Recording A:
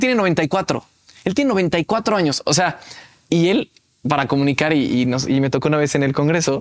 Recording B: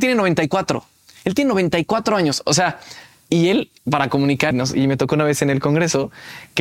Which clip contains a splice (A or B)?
B